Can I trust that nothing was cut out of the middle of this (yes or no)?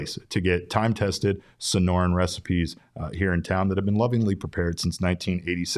yes